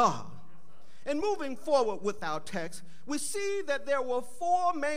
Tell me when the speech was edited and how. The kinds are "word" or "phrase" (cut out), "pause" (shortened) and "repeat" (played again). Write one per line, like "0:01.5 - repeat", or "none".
none